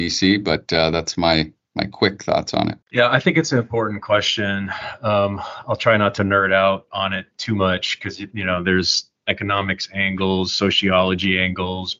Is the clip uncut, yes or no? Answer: no